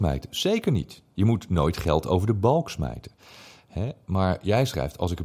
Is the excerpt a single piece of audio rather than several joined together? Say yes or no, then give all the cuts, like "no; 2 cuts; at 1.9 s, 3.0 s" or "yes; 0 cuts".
yes; 0 cuts